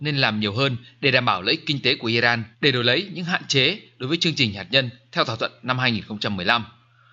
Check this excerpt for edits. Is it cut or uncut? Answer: cut